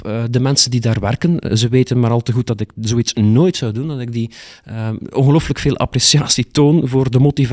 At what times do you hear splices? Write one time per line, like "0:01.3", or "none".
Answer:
none